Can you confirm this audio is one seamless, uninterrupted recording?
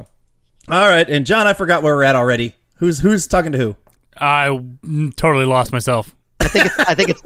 yes; 0 cuts

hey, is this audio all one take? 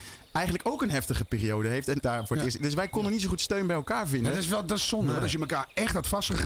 no; 1 cut; at 2.0 s

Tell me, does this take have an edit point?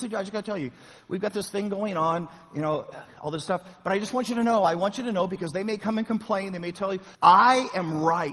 yes; 1 cut; at 7.1 s

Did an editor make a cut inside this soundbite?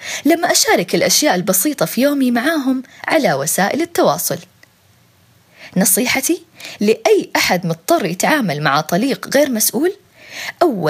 no; 0 cuts

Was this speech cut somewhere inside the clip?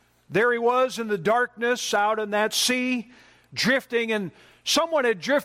no; 0 cuts

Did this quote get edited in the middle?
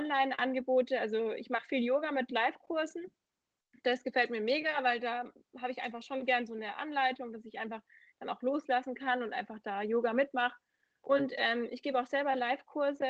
no; 0 cuts

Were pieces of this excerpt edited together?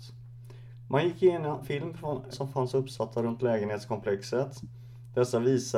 yes; 2 cuts; at 1.6 s, 2.3 s

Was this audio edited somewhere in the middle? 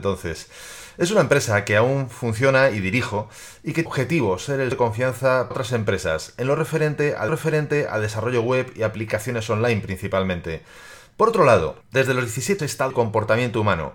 yes; 7 cuts; at 3.9 s, 4.7 s, 5.5 s, 7.3 s, 11.8 s, 12.6 s, 12.9 s

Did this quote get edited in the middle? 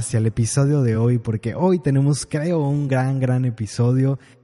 no; 0 cuts

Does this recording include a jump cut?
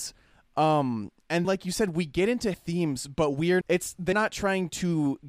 yes; 4 cuts; at 1.4 s, 2.5 s, 3.6 s, 4.1 s

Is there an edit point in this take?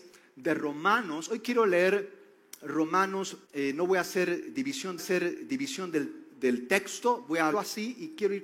yes; 3 cuts; at 3.4 s, 5.0 s, 7.5 s

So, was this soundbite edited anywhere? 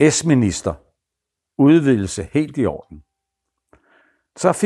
no; 0 cuts

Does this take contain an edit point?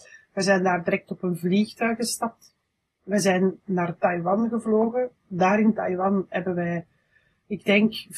no; 0 cuts

